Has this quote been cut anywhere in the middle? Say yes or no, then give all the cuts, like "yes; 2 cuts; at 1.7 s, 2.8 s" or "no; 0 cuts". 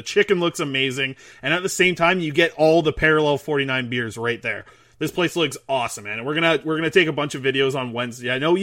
no; 0 cuts